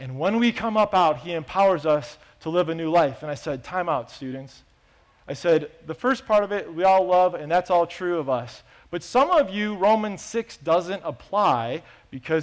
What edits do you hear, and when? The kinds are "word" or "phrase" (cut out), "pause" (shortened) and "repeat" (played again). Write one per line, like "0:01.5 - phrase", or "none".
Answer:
none